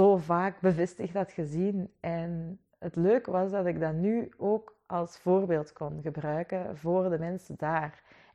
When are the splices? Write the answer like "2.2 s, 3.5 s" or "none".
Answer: none

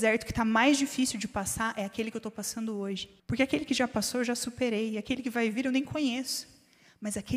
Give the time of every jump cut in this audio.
3.2 s

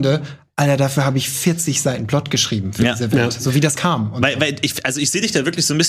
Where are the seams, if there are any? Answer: 3.8 s

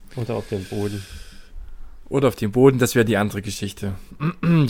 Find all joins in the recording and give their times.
none

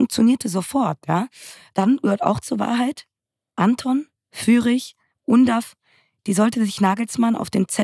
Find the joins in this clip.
none

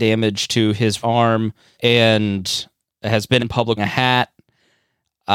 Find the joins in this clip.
1.0 s, 1.7 s, 3.4 s, 3.8 s

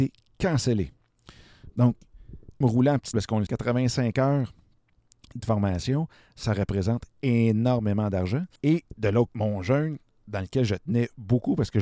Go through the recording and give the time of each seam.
2.6 s, 3.1 s, 3.5 s, 5.4 s, 8.6 s, 9.3 s

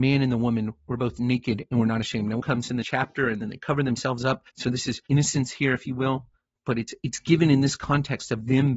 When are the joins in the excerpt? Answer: 2.4 s, 2.8 s, 4.5 s, 5.1 s, 6.4 s

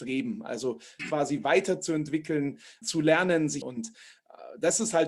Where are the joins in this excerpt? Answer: 1.0 s, 2.8 s, 3.6 s

